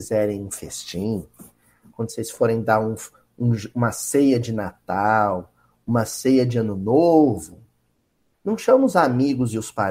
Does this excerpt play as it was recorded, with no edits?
yes; 0 cuts

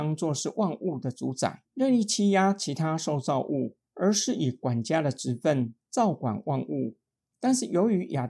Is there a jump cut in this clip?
yes; 2 cuts; at 1.7 s, 3.8 s

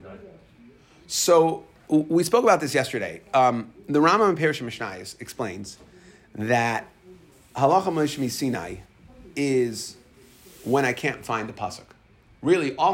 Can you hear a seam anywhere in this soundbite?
no; 0 cuts

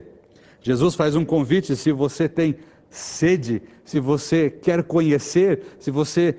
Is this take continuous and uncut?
yes; 0 cuts

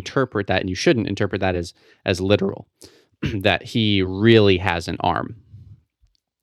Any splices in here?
no; 0 cuts

